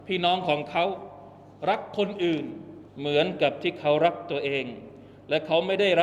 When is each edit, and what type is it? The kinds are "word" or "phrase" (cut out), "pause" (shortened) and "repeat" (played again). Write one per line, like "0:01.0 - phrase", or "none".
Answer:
0:02.9 - pause